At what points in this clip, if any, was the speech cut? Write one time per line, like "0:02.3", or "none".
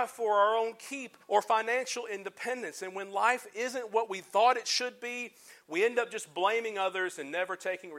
0:01.2